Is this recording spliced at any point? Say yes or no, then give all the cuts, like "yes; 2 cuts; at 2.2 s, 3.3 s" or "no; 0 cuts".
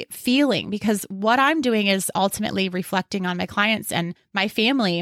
no; 0 cuts